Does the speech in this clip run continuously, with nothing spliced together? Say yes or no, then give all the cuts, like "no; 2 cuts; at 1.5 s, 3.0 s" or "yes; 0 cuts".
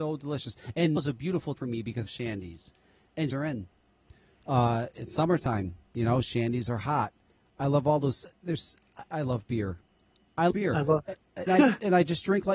no; 7 cuts; at 1.0 s, 1.5 s, 2.1 s, 3.3 s, 9.1 s, 10.5 s, 11.5 s